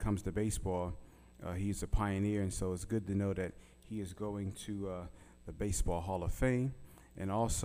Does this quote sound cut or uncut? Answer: uncut